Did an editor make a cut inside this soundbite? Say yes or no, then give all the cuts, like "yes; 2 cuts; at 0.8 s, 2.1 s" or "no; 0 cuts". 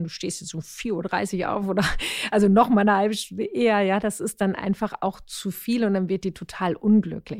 no; 0 cuts